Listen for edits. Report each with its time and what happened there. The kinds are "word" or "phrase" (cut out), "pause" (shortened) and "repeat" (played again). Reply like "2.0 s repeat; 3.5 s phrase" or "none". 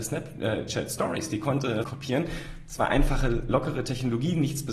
1.8 s phrase